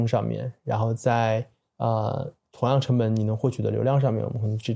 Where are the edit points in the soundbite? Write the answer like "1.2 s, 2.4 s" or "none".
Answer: none